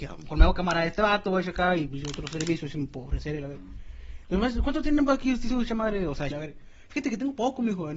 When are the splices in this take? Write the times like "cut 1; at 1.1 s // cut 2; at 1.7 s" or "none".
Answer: cut 1; at 1.9 s // cut 2; at 6.3 s